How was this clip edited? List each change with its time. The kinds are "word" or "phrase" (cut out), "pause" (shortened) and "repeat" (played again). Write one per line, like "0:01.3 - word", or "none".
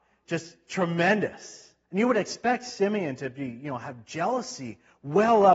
0:01.8 - pause